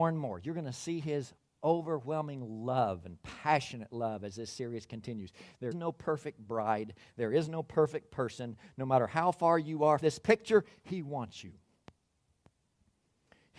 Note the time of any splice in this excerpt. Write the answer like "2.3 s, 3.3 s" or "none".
5.7 s, 10.0 s